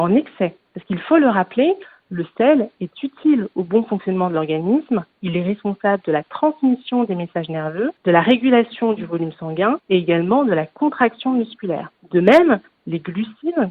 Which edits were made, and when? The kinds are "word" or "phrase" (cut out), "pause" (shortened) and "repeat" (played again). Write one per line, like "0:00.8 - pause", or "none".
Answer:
none